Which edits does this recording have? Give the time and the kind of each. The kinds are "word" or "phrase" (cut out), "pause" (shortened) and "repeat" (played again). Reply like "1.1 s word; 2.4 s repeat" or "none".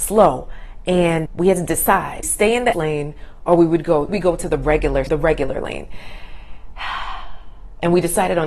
1.3 s word; 2.2 s phrase; 2.7 s word; 4.1 s phrase; 5.1 s word